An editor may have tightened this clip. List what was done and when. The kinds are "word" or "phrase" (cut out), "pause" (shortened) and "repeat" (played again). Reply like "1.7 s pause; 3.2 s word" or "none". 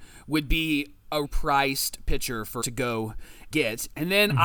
1.2 s word; 2.6 s word; 3.5 s word

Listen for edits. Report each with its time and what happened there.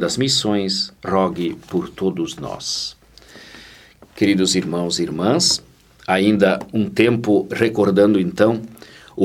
1.0 s pause

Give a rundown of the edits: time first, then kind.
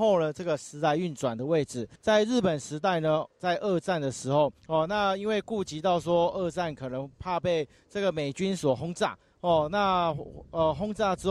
2.0 s pause; 4.6 s pause; 7.1 s pause

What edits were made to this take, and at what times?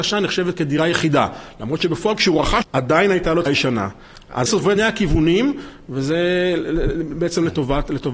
2.6 s word; 3.5 s word; 4.5 s word; 4.8 s word

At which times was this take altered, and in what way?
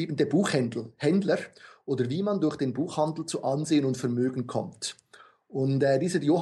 none

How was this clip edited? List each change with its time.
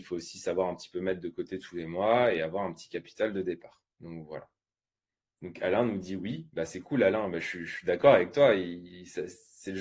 3.9 s pause

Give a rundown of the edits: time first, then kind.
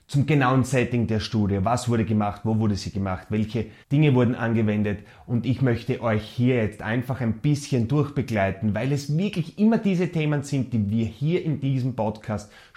3.8 s pause

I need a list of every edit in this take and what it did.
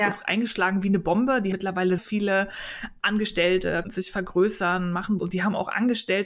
1.5 s word; 2.0 s word; 3.8 s word; 5.2 s word

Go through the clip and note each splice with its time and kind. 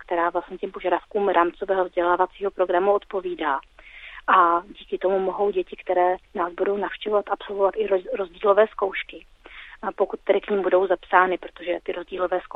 6.3 s pause

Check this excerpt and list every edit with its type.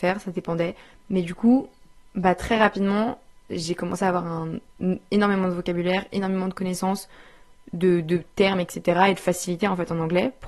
none

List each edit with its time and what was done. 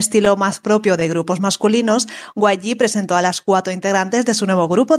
none

